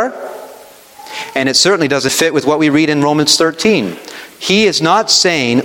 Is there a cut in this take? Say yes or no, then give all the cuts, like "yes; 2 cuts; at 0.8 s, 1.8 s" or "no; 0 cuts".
yes; 1 cut; at 2.1 s